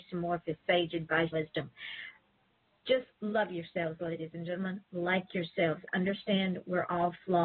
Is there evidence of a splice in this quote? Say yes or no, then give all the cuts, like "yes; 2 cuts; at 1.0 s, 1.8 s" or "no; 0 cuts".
yes; 2 cuts; at 1.3 s, 3.1 s